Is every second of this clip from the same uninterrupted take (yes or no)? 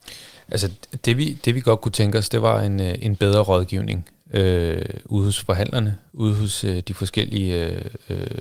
yes